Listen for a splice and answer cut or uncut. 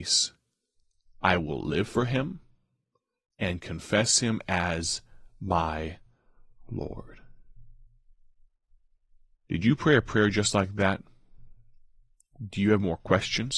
uncut